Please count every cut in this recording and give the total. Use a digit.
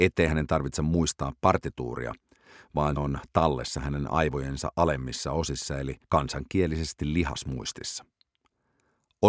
2